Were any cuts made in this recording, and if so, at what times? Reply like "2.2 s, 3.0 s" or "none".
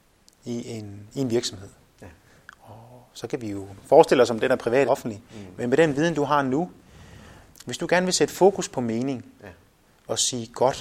4.8 s